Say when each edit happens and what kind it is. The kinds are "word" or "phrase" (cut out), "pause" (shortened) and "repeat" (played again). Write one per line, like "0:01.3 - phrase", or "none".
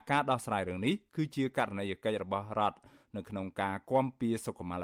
none